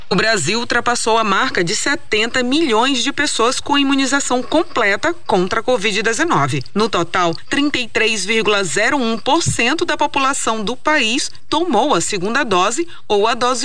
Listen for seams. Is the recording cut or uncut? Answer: uncut